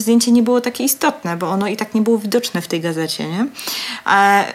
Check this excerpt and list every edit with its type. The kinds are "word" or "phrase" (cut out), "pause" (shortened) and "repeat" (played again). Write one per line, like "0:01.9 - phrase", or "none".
none